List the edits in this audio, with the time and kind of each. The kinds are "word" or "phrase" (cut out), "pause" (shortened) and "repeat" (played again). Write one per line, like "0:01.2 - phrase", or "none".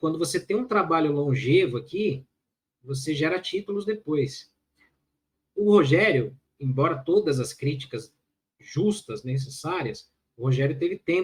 0:06.5 - pause